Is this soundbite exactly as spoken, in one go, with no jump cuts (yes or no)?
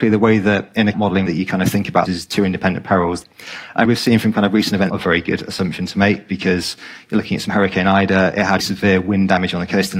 no